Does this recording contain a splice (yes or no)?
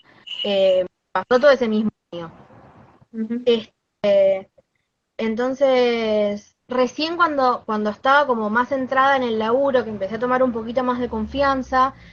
yes